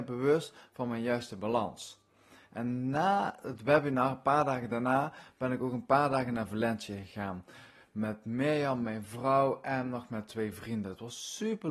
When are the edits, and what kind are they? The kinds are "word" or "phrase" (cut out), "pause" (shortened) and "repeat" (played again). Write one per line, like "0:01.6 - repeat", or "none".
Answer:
none